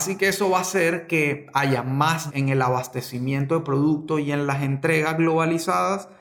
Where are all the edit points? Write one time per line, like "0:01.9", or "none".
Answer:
0:02.3